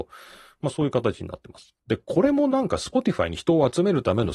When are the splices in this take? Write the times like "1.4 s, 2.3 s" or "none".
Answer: 1.8 s